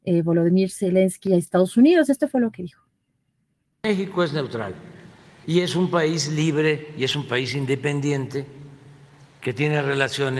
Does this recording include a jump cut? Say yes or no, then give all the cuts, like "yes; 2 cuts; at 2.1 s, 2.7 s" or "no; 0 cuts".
no; 0 cuts